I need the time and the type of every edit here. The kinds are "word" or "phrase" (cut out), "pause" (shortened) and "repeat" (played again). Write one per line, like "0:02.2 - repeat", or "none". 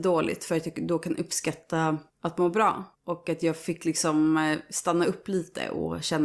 0:02.1 - pause
0:02.9 - pause